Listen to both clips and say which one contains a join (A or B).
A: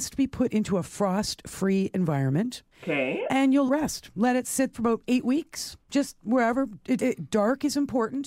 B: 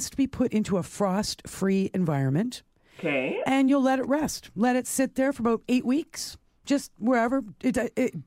A